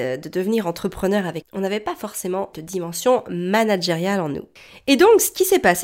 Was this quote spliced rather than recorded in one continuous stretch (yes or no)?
yes